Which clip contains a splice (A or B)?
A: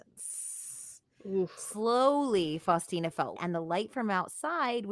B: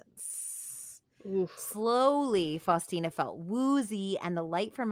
A